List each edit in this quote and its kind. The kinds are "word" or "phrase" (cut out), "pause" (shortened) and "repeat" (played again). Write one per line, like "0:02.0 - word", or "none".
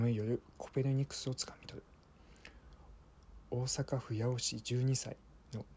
none